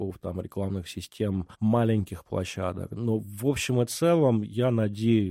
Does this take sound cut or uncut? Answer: cut